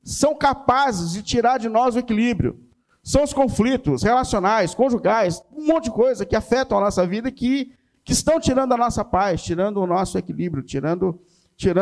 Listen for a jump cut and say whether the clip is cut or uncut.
uncut